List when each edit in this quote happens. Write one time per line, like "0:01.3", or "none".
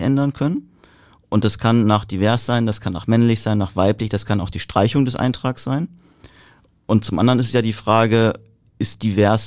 none